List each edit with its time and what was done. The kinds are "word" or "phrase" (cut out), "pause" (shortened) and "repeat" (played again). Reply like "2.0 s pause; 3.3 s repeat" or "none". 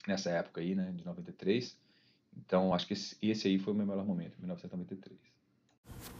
none